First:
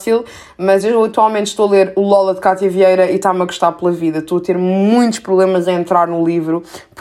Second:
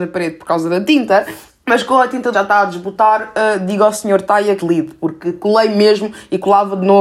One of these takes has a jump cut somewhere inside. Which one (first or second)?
second